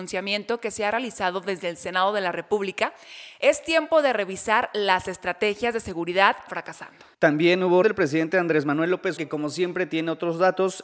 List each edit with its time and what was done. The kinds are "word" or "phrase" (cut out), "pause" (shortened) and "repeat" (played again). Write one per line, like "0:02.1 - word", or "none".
0:06.5 - phrase
0:07.1 - pause
0:07.8 - word
0:09.2 - word